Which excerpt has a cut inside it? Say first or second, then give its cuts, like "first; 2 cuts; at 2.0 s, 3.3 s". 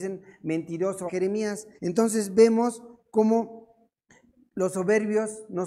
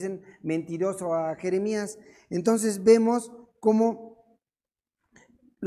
first; 3 cuts; at 1.1 s, 1.8 s, 4.1 s